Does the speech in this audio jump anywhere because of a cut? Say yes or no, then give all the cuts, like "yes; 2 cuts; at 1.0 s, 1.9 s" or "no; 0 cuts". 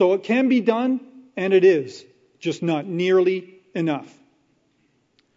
no; 0 cuts